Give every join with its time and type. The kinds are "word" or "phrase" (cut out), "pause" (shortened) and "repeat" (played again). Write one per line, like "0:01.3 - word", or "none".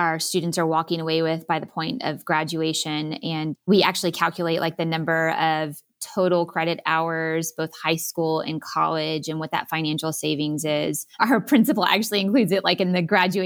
0:11.1 - pause